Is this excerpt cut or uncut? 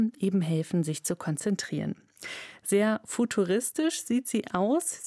uncut